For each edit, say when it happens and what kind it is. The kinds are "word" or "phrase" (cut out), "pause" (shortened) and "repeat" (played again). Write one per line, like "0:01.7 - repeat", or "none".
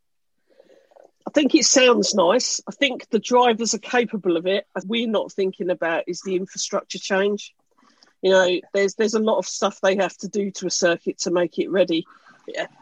0:04.8 - phrase

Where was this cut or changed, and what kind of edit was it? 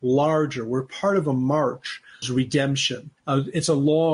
0:02.2 - word
0:03.2 - pause

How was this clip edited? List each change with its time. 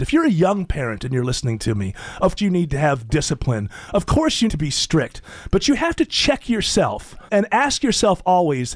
0:02.4 - word
0:04.5 - word
0:07.3 - word

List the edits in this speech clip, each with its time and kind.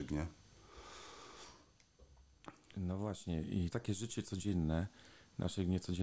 0:03.7 - phrase

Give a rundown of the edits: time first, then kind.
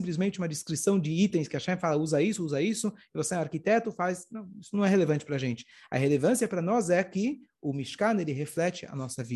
none

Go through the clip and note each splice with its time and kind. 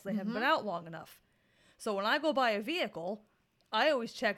none

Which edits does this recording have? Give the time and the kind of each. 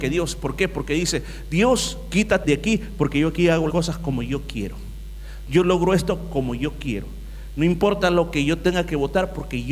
0:02.4 - word
0:03.7 - word

